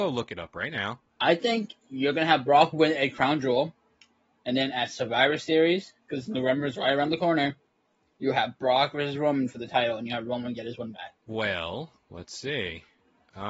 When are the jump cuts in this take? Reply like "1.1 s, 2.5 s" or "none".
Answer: 1.8 s, 11.2 s